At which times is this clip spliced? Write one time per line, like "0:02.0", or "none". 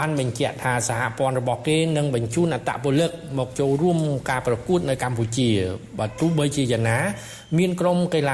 none